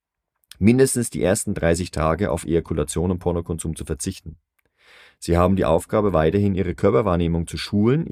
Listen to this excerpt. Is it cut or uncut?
uncut